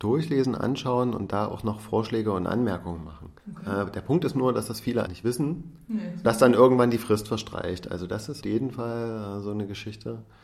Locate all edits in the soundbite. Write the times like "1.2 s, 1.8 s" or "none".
3.4 s, 5.1 s, 6.2 s, 8.4 s